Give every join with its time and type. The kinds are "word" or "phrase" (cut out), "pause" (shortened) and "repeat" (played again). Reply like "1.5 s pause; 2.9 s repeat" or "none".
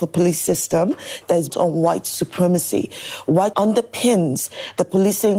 1.5 s word; 3.5 s word